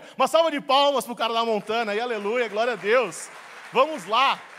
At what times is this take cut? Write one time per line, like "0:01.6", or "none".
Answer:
none